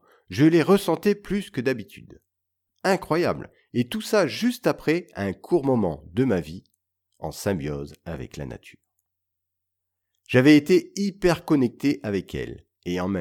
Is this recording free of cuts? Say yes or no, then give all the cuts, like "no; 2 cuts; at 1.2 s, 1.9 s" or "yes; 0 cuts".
yes; 0 cuts